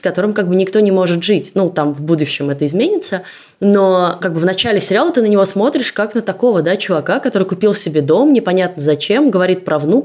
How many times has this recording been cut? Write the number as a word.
zero